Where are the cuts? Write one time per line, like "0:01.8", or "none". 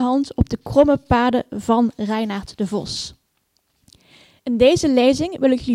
none